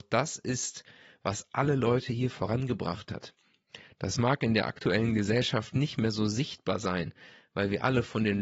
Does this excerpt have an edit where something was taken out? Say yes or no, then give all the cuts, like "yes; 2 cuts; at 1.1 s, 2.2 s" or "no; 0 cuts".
no; 0 cuts